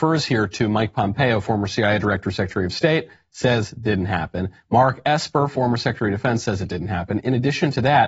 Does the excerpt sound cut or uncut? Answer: uncut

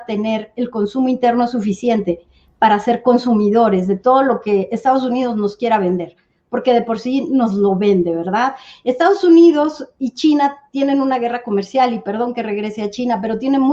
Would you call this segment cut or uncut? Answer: uncut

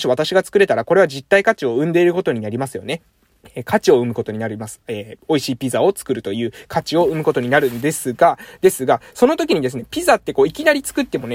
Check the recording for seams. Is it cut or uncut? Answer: cut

